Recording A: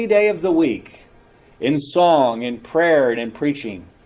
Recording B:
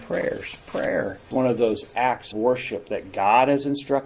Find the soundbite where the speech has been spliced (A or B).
B